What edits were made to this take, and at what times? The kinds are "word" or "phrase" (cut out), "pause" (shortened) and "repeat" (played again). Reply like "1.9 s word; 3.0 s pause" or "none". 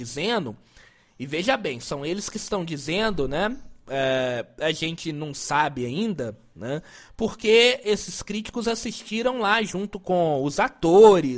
none

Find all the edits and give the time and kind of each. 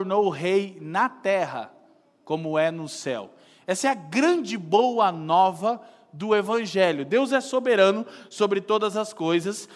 none

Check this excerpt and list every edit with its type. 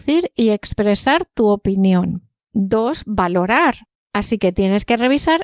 none

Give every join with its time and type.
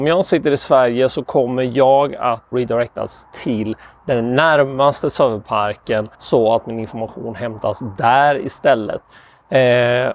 2.5 s word; 6.1 s pause

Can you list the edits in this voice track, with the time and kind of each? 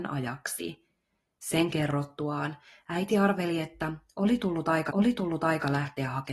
4.9 s repeat

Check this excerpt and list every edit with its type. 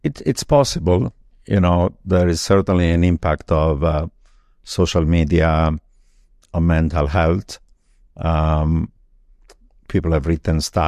none

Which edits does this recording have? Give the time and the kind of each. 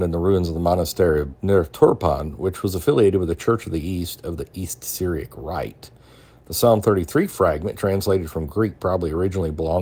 1.3 s word

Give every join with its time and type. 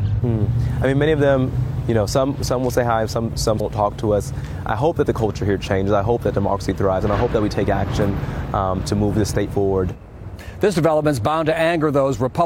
3.6 s word

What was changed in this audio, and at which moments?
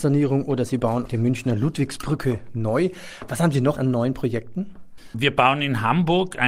1.1 s word; 3.8 s word

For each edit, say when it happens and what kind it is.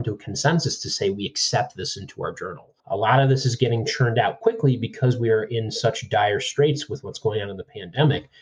2.8 s pause

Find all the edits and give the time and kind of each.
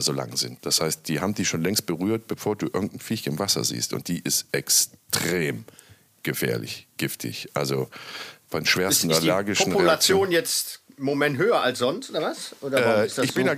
none

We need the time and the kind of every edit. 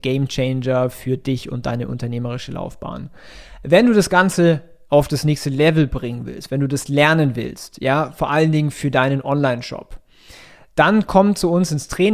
none

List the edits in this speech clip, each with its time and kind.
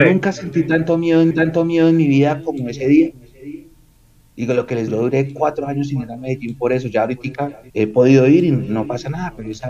1.3 s repeat; 4.9 s word; 7.7 s pause

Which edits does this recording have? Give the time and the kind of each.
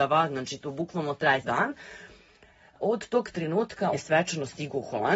1.4 s word; 3.9 s word

